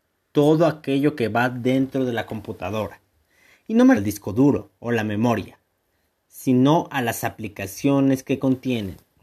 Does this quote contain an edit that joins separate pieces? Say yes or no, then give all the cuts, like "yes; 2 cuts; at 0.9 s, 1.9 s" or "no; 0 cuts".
yes; 2 cuts; at 4.0 s, 4.8 s